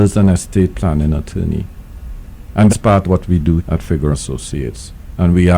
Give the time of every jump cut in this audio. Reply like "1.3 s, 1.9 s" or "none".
2.7 s, 3.0 s, 3.6 s, 4.1 s